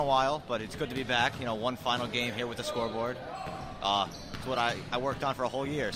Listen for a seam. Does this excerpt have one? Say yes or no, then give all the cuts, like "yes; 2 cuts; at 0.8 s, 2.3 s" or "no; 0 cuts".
no; 0 cuts